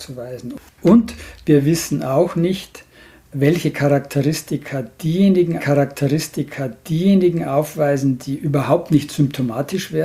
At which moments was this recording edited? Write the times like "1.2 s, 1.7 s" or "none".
5.6 s